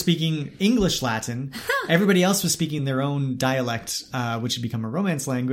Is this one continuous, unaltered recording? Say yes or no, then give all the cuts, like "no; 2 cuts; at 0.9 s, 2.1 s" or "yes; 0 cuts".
yes; 0 cuts